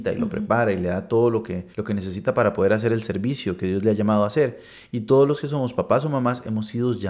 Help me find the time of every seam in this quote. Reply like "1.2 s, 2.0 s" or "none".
1.7 s